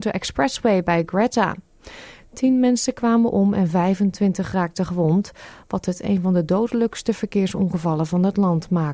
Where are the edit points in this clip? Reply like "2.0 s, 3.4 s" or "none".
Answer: none